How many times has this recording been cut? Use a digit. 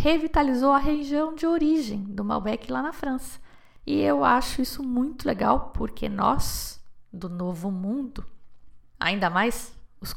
0